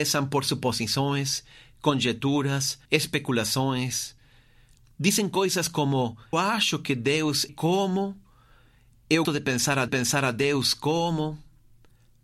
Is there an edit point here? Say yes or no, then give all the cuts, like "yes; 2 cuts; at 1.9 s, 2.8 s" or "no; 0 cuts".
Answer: yes; 5 cuts; at 2.9 s, 6.3 s, 7.5 s, 9.2 s, 9.9 s